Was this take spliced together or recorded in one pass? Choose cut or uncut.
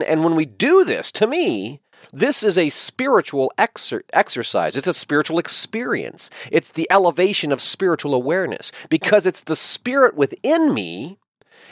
uncut